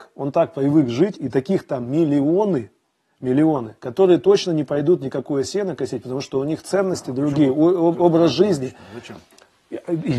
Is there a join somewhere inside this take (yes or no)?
no